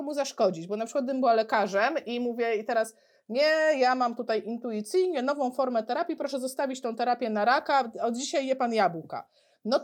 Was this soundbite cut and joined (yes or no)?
no